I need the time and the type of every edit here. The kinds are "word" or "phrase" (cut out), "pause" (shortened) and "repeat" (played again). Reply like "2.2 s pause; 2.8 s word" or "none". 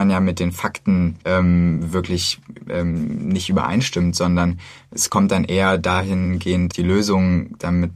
1.2 s pause; 6.7 s word